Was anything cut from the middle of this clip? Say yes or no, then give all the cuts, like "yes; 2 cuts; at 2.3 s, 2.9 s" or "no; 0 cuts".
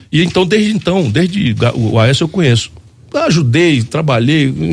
no; 0 cuts